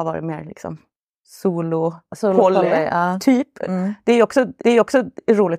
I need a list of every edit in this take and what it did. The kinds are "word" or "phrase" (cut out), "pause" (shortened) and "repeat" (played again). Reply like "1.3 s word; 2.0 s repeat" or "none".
1.1 s pause; 4.6 s repeat